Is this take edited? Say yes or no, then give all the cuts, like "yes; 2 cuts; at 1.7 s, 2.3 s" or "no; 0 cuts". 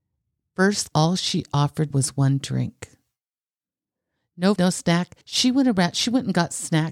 yes; 4 cuts; at 0.9 s, 1.9 s, 4.6 s, 5.2 s